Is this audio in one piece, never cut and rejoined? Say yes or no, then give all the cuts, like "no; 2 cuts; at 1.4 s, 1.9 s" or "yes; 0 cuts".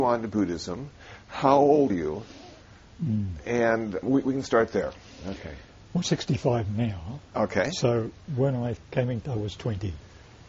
no; 5 cuts; at 1.9 s, 4.0 s, 6.0 s, 8.8 s, 9.2 s